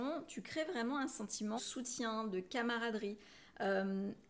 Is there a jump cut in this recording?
yes; 1 cut; at 1.6 s

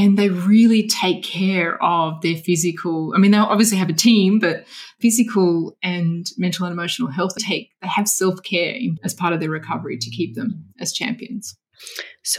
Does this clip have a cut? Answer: yes; 3 cuts; at 5.0 s, 7.4 s, 9.0 s

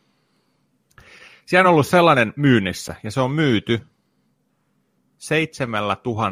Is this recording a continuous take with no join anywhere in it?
yes; 0 cuts

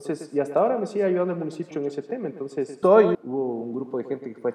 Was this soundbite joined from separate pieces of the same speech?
yes; 3 cuts; at 1.7 s, 2.8 s, 3.1 s

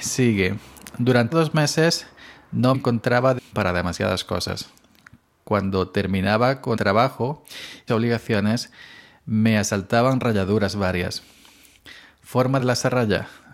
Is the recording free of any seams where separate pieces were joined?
no; 6 cuts; at 1.3 s, 2.7 s, 3.4 s, 6.8 s, 7.9 s, 12.6 s

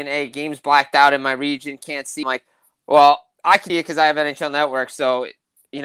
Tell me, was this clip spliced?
yes; 2 cuts; at 2.2 s, 3.7 s

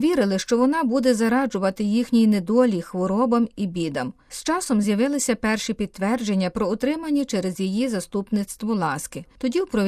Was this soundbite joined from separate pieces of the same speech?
no; 0 cuts

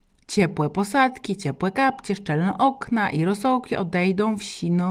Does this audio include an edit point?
no; 0 cuts

